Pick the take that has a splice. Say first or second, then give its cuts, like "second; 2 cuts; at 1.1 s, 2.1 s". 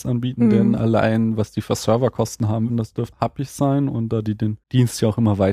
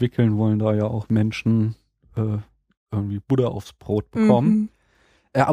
first; 3 cuts; at 2.7 s, 3.1 s, 4.6 s